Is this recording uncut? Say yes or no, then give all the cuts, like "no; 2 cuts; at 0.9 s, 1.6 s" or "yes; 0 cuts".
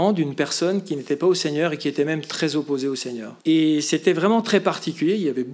no; 1 cut; at 3.4 s